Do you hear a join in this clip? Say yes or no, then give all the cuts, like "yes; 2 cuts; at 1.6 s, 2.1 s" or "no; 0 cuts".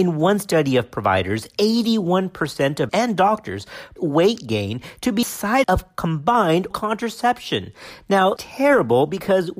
yes; 6 cuts; at 2.9 s, 4.0 s, 5.2 s, 5.6 s, 6.7 s, 8.4 s